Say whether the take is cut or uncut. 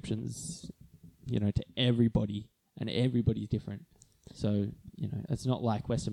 uncut